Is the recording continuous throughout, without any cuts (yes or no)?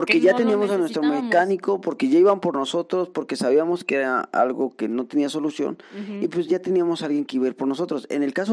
no